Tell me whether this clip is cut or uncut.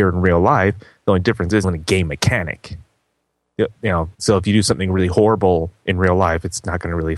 cut